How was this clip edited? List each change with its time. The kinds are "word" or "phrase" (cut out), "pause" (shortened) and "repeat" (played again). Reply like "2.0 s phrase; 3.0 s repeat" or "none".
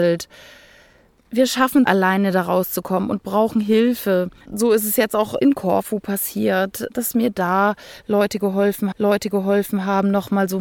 1.8 s phrase; 4.4 s pause; 8.9 s repeat

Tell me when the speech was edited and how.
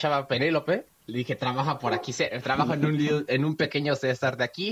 0.9 s pause

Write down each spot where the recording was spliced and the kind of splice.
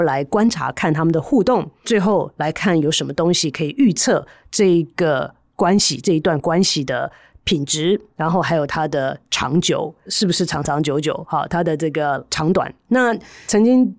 none

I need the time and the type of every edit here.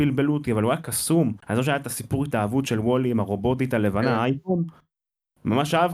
1.4 s pause

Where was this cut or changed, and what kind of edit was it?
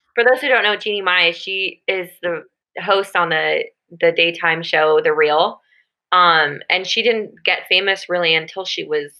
2.6 s pause

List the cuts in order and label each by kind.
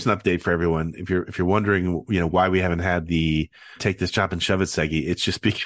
3.8 s word

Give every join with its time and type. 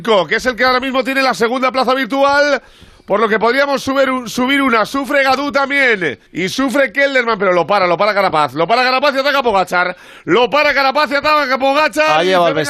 6.3 s pause

